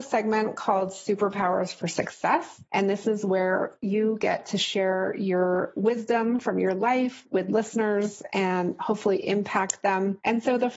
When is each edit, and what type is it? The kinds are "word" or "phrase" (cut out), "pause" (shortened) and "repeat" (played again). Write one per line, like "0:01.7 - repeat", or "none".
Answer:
none